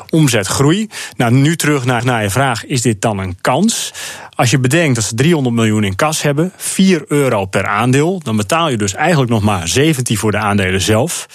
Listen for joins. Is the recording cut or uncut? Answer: cut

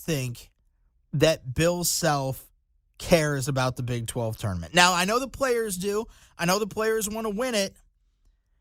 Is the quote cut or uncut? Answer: uncut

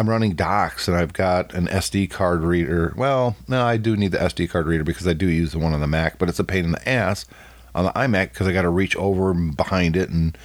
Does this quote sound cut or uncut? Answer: uncut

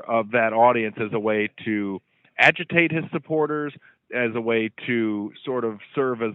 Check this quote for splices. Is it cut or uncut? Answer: uncut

